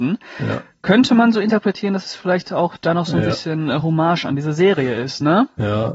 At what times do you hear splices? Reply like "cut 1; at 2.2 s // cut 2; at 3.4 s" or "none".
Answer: none